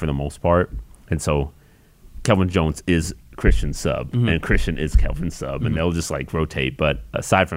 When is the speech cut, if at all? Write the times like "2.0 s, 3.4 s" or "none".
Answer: none